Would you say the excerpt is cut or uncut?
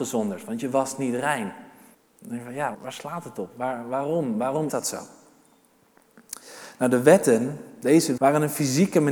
cut